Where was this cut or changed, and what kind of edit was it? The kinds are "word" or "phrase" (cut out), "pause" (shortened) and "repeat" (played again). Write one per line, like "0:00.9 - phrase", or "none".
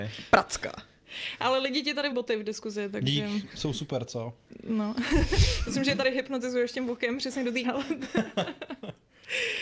0:02.1 - word
0:07.6 - word

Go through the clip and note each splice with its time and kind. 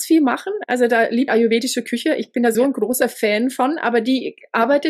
0:01.3 - phrase
0:02.5 - word

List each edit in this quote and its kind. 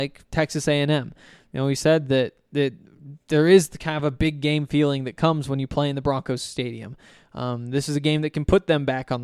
none

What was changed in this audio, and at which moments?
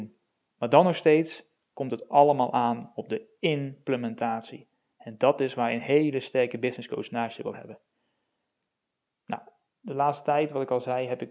none

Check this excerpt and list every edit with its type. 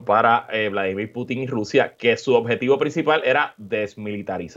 none

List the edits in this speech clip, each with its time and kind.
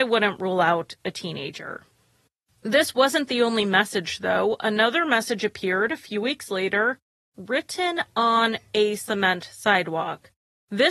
none

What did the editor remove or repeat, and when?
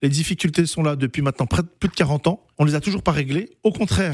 0:02.5 - pause

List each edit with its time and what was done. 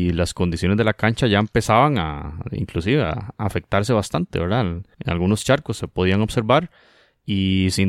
0:04.9 - pause

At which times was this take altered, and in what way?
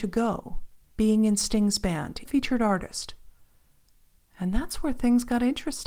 0:02.2 - phrase

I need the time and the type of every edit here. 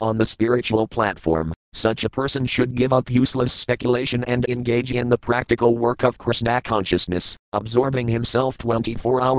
0:01.6 - pause

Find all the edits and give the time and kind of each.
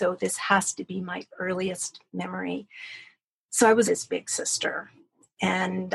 0:03.8 - word

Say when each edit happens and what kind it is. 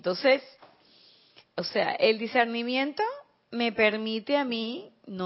none

